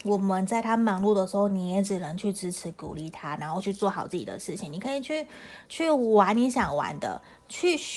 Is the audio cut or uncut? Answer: cut